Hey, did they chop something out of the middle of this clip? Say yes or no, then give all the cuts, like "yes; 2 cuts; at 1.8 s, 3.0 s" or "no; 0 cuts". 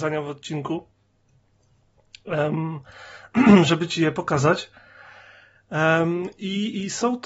no; 0 cuts